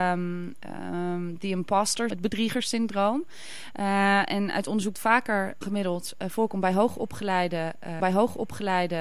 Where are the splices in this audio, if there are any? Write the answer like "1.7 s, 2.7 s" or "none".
2.1 s, 4.9 s, 5.6 s, 8.0 s